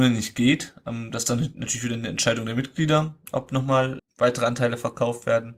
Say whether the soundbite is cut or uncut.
cut